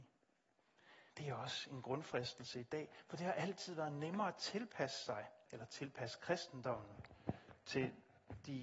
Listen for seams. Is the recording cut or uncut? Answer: cut